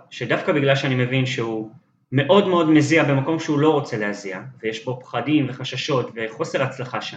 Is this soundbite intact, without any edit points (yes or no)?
yes